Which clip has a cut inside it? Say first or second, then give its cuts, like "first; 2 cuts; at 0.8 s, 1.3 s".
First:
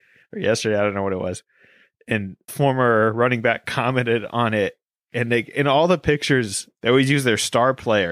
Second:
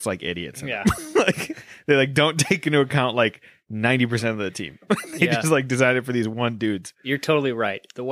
first; 1 cut; at 2.5 s